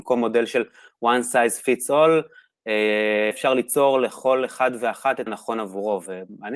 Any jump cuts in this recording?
yes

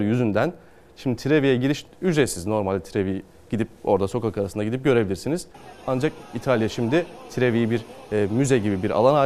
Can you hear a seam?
no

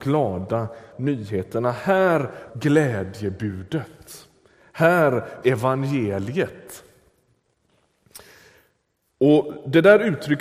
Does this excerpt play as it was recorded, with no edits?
no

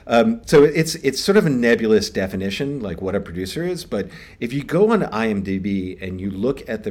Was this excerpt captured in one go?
yes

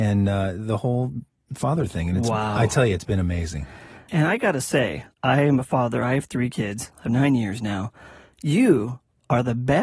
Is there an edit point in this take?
yes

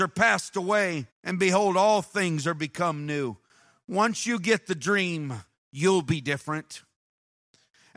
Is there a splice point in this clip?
yes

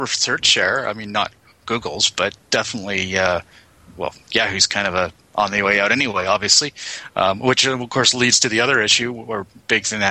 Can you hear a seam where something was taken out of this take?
no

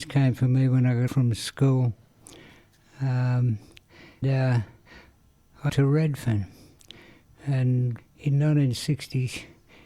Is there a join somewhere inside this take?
yes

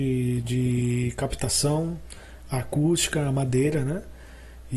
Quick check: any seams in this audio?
no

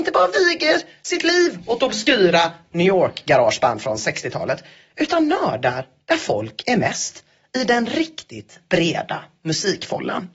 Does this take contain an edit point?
no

